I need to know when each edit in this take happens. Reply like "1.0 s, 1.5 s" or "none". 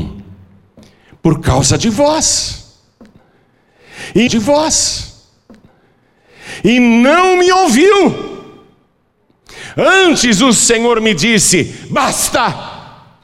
4.3 s